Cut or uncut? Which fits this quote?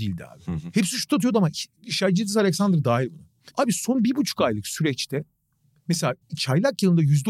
cut